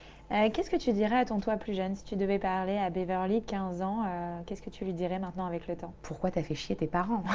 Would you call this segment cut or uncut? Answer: cut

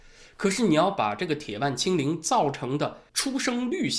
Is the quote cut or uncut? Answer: cut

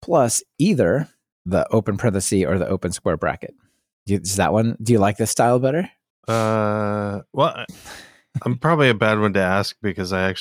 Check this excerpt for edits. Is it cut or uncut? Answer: uncut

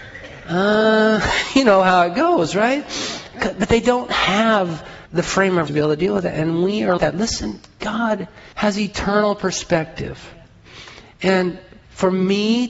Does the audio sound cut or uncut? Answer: cut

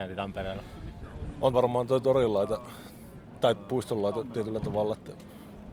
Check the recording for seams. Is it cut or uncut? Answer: cut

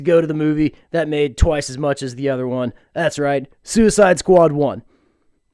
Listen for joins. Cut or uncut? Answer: uncut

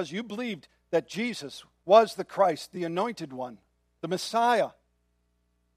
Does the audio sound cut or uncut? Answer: uncut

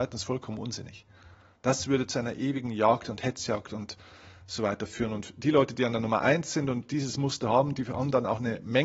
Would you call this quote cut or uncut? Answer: uncut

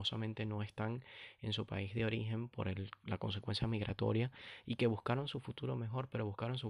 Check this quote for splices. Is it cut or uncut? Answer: uncut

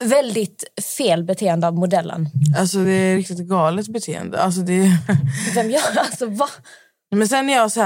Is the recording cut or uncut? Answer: uncut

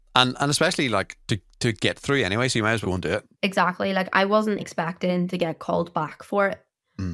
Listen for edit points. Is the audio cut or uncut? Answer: cut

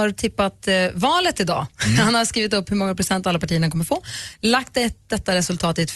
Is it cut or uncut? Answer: uncut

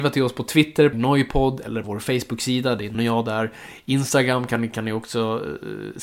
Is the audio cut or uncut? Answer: cut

